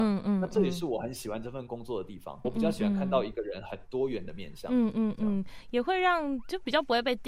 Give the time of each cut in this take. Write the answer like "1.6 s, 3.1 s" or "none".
2.4 s